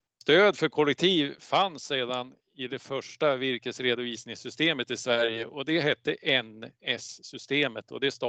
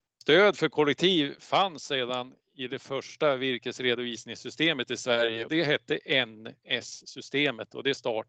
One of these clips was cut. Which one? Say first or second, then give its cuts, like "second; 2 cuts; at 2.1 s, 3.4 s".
second; 1 cut; at 5.5 s